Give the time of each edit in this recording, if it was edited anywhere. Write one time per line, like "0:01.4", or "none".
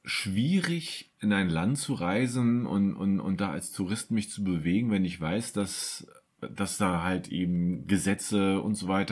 none